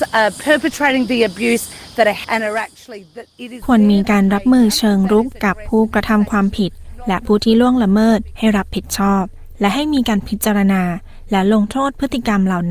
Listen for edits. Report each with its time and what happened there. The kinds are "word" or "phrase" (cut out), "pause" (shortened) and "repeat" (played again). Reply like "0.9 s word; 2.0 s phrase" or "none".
2.2 s phrase